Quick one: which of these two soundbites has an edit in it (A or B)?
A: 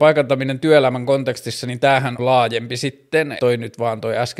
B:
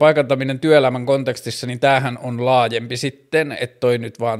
A